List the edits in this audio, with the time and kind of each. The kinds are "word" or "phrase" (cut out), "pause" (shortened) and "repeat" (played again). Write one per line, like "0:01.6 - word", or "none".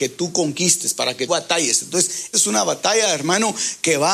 0:01.3 - word
0:02.3 - word